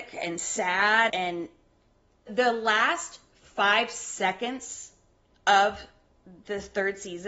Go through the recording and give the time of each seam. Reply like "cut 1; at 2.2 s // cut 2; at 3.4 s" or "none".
cut 1; at 1.1 s // cut 2; at 2.3 s